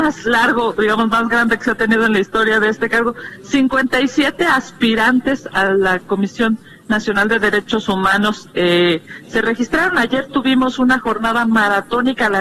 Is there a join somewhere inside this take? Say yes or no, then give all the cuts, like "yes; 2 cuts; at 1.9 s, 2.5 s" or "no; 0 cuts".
no; 0 cuts